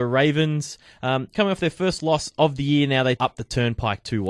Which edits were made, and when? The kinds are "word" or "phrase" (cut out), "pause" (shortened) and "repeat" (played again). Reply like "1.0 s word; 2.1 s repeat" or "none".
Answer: 1.3 s word; 3.2 s word